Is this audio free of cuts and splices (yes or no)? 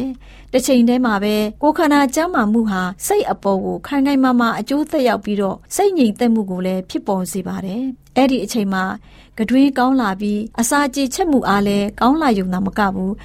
no